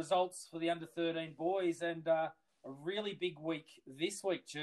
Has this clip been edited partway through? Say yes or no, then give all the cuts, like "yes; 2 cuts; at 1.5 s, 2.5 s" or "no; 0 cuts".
no; 0 cuts